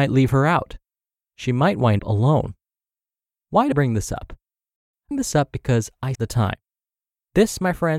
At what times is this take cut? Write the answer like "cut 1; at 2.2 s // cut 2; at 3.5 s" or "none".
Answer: cut 1; at 2.0 s // cut 2; at 3.7 s // cut 3; at 5.1 s // cut 4; at 6.1 s